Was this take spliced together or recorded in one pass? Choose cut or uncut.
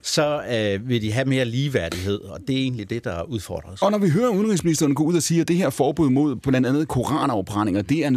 uncut